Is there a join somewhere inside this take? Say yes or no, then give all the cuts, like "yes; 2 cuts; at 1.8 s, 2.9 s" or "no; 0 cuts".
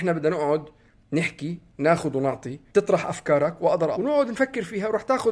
yes; 2 cuts; at 2.7 s, 3.9 s